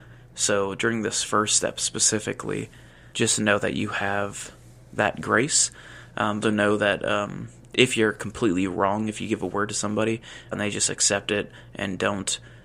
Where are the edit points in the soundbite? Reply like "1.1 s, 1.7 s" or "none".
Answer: 3.1 s, 6.4 s, 10.5 s